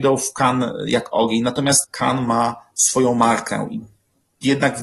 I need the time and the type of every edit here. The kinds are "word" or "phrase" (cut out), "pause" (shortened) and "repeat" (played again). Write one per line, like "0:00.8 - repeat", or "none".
0:01.8 - phrase